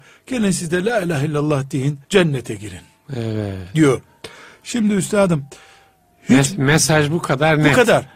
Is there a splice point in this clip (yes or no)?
yes